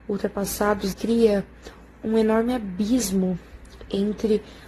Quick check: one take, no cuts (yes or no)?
no